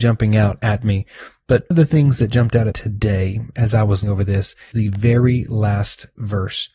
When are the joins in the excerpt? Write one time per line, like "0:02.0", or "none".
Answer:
0:01.7
0:02.7
0:04.0
0:04.7

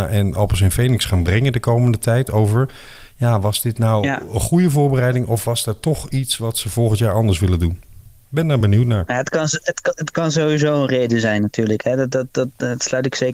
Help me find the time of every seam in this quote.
none

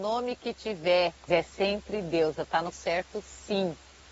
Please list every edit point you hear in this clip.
0:01.3
0:02.7

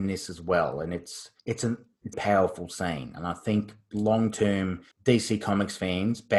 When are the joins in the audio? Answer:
0:01.4
0:02.1
0:04.9

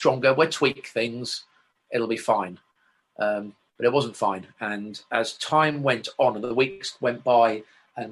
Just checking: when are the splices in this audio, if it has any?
none

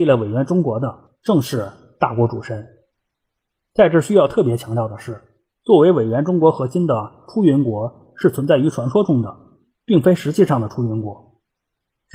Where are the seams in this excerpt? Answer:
none

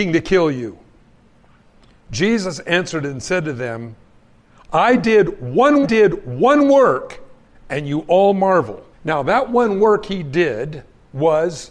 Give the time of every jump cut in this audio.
0:05.8
0:08.9

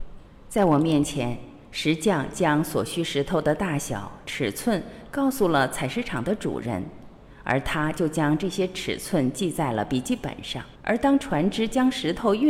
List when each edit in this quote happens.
0:10.8

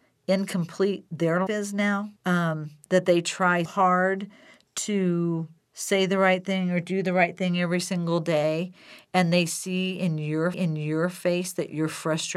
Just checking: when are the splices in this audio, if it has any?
0:01.5
0:02.2
0:03.6
0:05.6
0:10.5

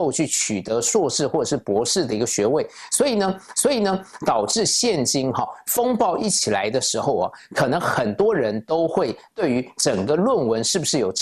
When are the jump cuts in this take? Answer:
0:03.5

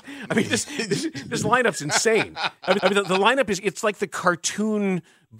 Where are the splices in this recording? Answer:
0:02.8
0:03.6

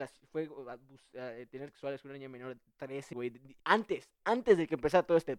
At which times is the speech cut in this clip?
0:01.7
0:03.1
0:03.6

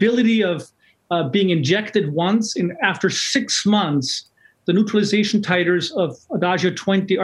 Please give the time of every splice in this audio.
none

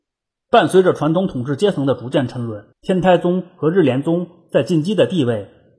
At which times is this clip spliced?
0:02.7

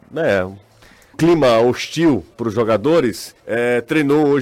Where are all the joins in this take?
0:01.1
0:02.3
0:03.4

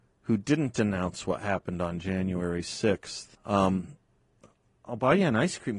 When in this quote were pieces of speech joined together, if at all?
0:03.3

